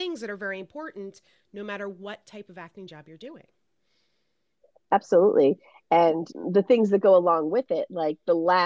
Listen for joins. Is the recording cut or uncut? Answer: uncut